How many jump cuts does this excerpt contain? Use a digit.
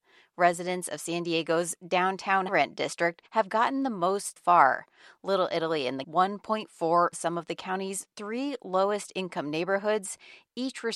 5